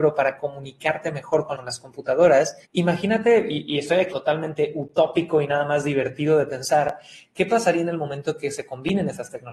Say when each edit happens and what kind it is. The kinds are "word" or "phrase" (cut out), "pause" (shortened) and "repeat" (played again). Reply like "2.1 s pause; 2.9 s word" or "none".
1.5 s phrase; 2.6 s pause; 4.1 s phrase